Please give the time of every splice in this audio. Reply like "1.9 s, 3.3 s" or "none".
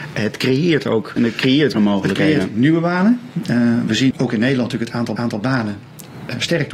1.2 s, 1.7 s, 4.1 s, 5.2 s